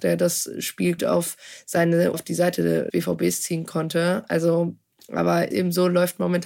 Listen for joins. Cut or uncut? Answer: cut